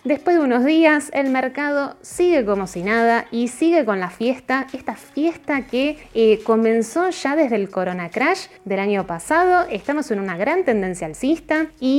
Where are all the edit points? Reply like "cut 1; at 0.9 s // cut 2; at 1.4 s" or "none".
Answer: none